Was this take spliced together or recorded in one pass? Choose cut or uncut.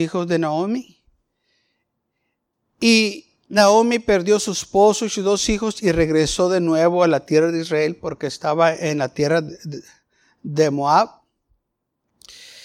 uncut